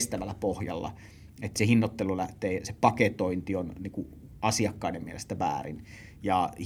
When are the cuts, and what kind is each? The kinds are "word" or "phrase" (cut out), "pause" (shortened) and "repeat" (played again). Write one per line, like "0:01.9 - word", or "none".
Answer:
none